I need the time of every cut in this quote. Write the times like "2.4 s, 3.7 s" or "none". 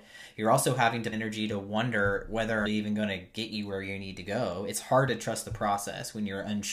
1.1 s, 2.7 s